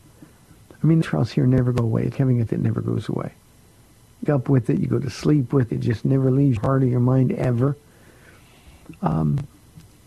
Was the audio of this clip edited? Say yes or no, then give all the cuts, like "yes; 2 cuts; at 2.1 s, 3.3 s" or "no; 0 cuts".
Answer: yes; 6 cuts; at 1.0 s, 2.1 s, 2.5 s, 4.3 s, 5.7 s, 6.6 s